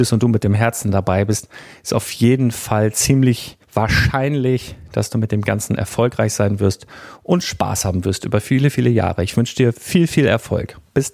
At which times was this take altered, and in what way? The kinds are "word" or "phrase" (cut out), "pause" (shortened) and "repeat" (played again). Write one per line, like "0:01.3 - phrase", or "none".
0:03.6 - pause